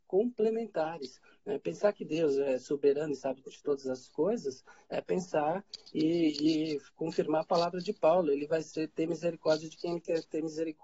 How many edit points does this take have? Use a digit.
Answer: 0